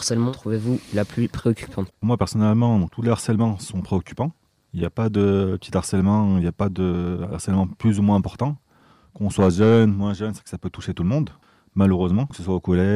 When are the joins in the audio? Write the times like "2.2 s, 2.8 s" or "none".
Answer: none